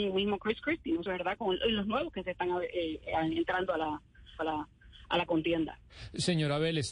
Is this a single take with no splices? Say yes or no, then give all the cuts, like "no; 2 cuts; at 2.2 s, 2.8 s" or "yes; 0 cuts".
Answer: no; 2 cuts; at 1.1 s, 4.4 s